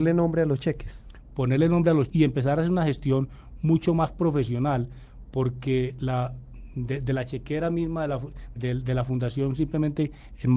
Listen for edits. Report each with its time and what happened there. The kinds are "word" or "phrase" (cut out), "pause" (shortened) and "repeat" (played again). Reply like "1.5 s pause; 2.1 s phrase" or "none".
2.1 s word; 8.6 s word